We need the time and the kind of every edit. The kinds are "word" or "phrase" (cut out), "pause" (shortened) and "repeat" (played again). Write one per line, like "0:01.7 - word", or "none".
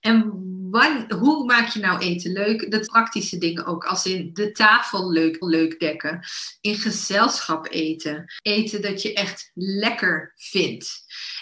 0:02.9 - phrase
0:05.4 - repeat
0:08.4 - word